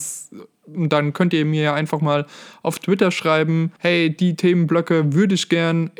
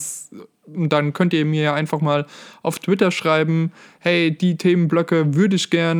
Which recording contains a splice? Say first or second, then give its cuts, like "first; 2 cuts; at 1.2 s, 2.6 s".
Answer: first; 1 cut; at 3.8 s